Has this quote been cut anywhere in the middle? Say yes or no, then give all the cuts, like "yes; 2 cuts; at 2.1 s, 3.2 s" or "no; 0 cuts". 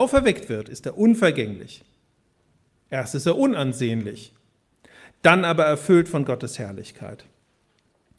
no; 0 cuts